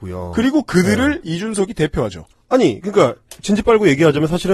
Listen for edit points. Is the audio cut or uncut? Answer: cut